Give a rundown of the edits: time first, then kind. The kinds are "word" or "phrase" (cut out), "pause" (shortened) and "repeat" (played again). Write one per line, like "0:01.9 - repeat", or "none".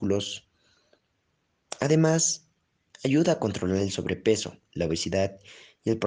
none